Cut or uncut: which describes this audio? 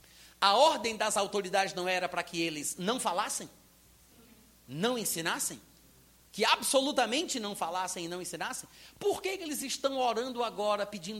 uncut